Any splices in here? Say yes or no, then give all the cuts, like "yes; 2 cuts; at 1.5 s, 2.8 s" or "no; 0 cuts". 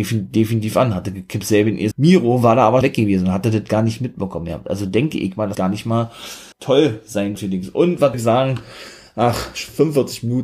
yes; 6 cuts; at 1.9 s, 2.8 s, 5.5 s, 6.5 s, 7.4 s, 8.1 s